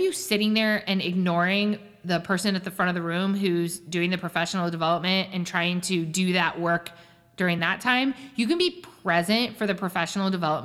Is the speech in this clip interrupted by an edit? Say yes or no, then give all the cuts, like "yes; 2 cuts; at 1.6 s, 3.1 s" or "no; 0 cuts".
no; 0 cuts